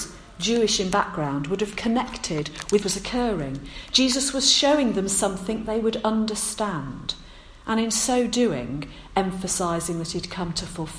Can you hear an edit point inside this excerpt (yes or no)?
yes